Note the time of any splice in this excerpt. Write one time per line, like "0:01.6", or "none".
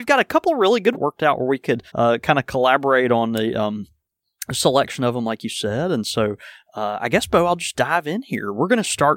0:00.9
0:01.9